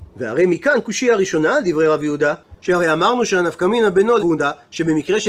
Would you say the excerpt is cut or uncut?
cut